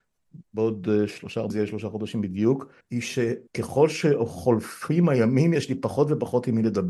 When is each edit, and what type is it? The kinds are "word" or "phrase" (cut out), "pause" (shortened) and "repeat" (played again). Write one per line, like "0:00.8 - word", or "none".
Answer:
0:01.5 - word
0:02.8 - pause
0:03.5 - pause